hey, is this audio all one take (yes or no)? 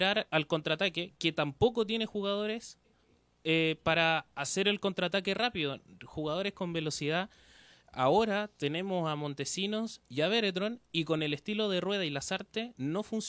yes